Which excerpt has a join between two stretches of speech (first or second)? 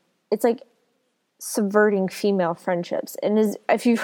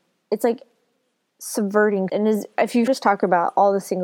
second